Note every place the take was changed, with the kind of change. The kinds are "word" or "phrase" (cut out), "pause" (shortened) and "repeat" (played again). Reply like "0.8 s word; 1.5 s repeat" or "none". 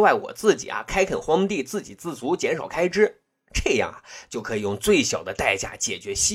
none